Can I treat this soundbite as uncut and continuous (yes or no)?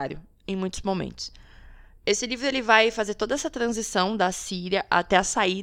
yes